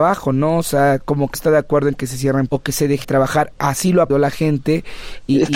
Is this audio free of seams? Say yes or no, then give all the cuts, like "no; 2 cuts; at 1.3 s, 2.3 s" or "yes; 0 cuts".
no; 4 cuts; at 1.3 s, 2.5 s, 3.0 s, 4.1 s